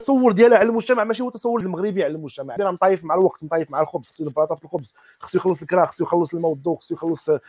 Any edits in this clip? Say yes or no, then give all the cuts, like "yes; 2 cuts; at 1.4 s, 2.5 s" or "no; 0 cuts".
yes; 2 cuts; at 1.6 s, 2.6 s